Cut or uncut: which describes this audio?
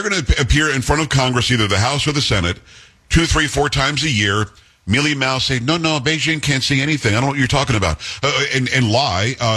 uncut